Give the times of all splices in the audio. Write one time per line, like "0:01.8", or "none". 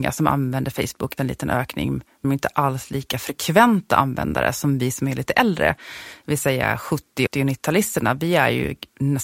0:01.2
0:02.2
0:07.3